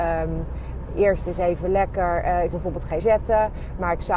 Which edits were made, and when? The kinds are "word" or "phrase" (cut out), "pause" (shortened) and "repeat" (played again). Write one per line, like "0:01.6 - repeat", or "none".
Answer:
0:02.5 - word
0:03.0 - word